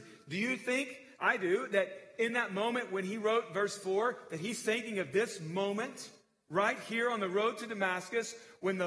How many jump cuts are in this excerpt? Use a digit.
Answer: 0